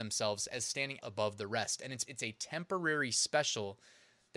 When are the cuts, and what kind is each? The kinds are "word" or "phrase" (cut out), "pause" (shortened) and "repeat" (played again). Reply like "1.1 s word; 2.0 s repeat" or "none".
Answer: 1.0 s word; 2.1 s word